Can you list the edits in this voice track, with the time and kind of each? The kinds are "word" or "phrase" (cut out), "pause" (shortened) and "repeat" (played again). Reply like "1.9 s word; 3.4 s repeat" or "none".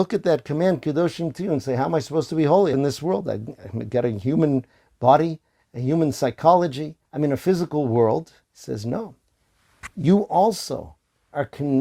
2.7 s phrase; 5.6 s pause; 7.0 s pause; 8.4 s pause

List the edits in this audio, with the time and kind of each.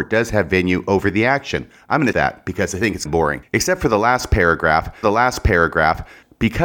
2.1 s word; 3.1 s word; 5.0 s repeat

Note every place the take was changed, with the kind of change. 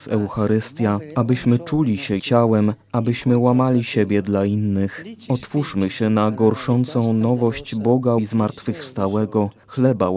2.2 s word; 8.2 s word

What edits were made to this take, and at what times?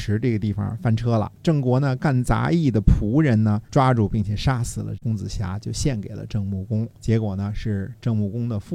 1.4 s pause; 3.7 s pause; 6.9 s pause

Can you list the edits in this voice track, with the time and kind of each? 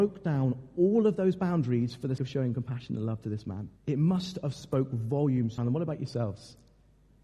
2.2 s word; 3.8 s pause; 5.6 s phrase

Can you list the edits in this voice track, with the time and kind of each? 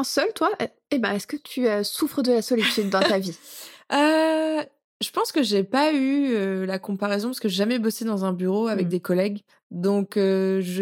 9.5 s pause

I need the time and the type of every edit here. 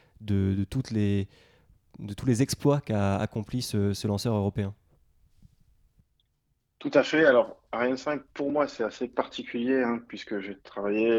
none

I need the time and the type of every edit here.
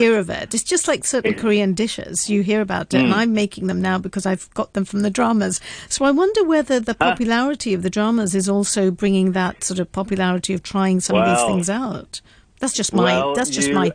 none

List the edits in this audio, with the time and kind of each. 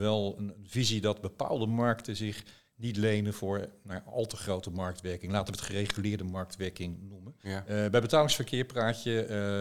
7.4 s pause

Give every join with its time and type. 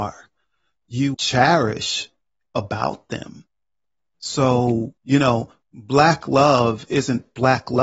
1.1 s word; 2.5 s word; 5.0 s pause

